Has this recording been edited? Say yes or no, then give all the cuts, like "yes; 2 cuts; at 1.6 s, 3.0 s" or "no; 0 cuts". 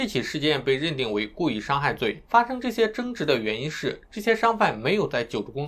yes; 2 cuts; at 2.2 s, 4.0 s